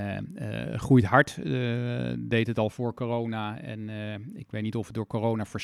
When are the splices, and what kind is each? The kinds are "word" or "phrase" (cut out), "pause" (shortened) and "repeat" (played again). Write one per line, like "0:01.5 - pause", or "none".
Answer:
none